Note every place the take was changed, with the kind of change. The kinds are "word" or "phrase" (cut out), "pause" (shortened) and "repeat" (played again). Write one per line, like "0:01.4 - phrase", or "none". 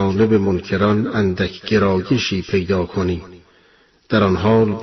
none